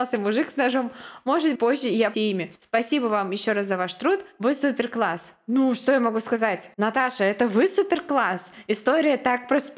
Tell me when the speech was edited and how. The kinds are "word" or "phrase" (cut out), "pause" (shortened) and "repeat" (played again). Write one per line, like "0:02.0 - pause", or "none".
0:01.5 - word
0:02.1 - word
0:02.5 - pause
0:06.7 - pause